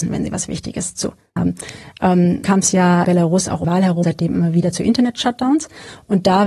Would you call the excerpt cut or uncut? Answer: cut